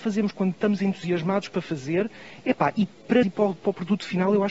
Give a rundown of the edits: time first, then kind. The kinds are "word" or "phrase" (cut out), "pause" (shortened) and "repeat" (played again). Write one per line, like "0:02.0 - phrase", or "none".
0:03.2 - word